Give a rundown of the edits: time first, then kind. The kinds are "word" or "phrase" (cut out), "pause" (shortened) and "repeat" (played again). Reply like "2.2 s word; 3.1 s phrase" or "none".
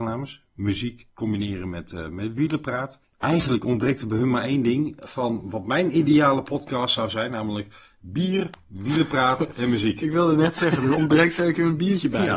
1.1 s pause; 3.1 s pause; 10.9 s word